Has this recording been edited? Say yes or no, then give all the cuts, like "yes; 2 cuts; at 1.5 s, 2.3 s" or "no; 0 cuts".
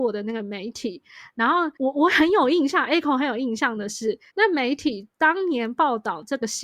yes; 2 cuts; at 1.7 s, 4.3 s